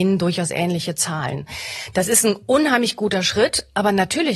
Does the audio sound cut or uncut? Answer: uncut